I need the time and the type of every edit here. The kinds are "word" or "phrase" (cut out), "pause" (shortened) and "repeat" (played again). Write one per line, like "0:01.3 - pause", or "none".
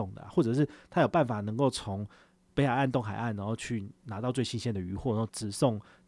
none